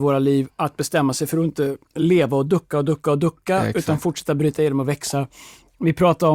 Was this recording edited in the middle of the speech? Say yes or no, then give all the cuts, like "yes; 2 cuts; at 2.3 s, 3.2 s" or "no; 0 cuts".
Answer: yes; 1 cut; at 1.8 s